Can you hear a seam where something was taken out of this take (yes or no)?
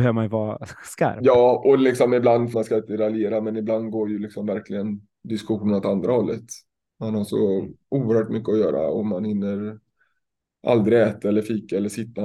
yes